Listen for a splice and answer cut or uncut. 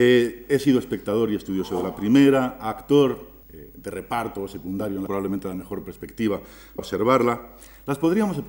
cut